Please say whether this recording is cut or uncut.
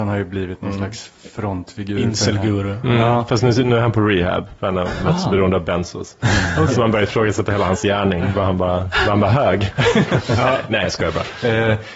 cut